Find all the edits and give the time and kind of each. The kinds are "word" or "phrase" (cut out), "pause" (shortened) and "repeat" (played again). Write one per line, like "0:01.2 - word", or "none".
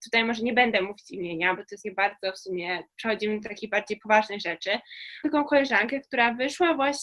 0:01.8 - word
0:02.9 - word
0:05.2 - phrase